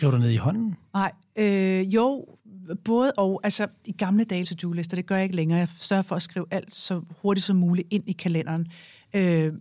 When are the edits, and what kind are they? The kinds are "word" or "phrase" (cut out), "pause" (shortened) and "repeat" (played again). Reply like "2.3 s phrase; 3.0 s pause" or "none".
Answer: 4.4 s word

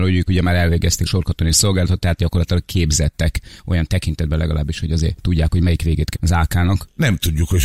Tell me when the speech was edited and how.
1.1 s word; 6.1 s word

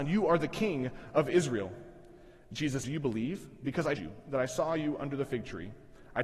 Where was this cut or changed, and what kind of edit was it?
2.8 s word; 4.0 s word

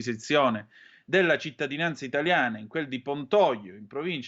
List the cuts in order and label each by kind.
none

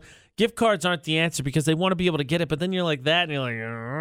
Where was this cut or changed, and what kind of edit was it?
none

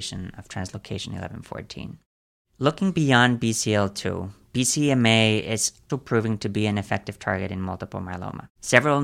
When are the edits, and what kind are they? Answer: 5.9 s word

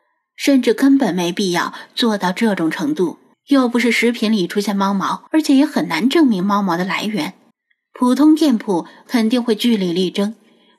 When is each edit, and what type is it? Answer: 3.3 s pause; 5.3 s pause; 7.5 s pause

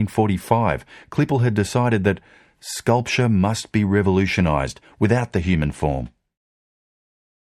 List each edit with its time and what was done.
none

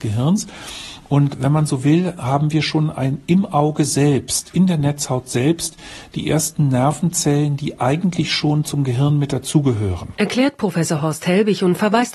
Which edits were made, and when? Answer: none

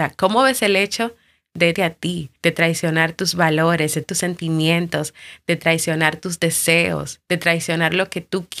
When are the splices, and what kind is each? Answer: 1.7 s word; 2.4 s pause; 4.0 s word; 7.2 s pause

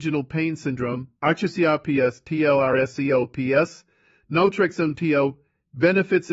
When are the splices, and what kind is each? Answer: 1.2 s pause

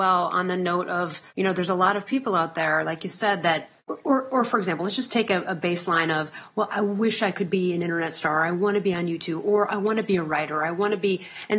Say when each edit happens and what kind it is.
1.3 s pause; 3.8 s pause; 6.7 s word

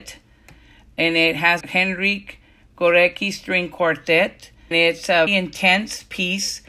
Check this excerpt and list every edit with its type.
1.6 s word; 4.7 s word; 5.3 s word

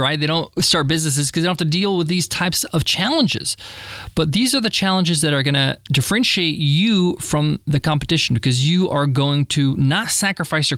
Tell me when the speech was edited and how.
none

